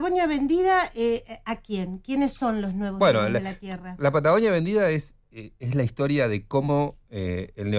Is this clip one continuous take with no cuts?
yes; 0 cuts

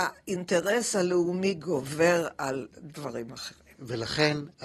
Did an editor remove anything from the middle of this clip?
no; 0 cuts

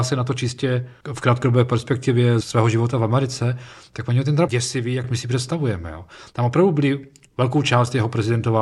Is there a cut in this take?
yes; 3 cuts; at 1.0 s, 2.4 s, 4.5 s

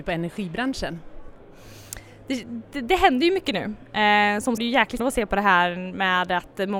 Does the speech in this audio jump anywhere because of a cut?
yes; 2 cuts; at 4.6 s, 5.0 s

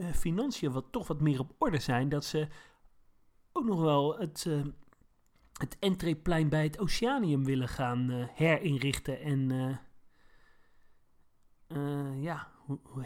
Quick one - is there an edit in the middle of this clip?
no; 0 cuts

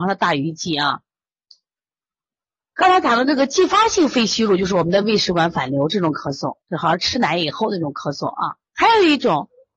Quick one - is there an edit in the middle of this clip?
yes; 2 cuts; at 6.6 s, 8.7 s

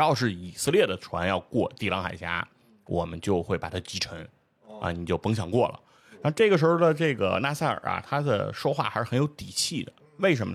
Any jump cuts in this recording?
no; 0 cuts

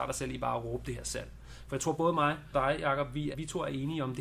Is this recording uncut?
no; 2 cuts; at 2.5 s, 3.3 s

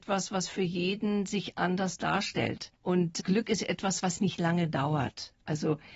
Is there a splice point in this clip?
yes; 1 cut; at 2.8 s

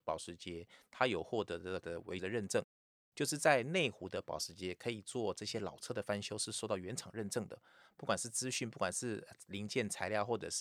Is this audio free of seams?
no; 2 cuts; at 1.8 s, 2.2 s

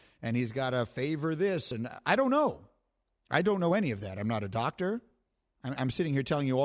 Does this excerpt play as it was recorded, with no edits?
yes; 0 cuts

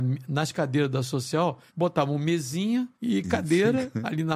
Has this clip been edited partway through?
yes; 2 cuts; at 1.7 s, 2.9 s

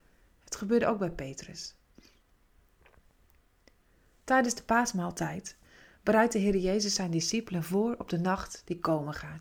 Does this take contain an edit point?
no; 0 cuts

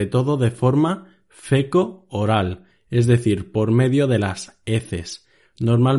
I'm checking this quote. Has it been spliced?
no; 0 cuts

